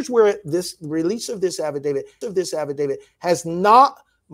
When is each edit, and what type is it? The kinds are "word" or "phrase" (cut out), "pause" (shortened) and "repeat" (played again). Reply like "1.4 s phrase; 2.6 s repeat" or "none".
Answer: 2.2 s repeat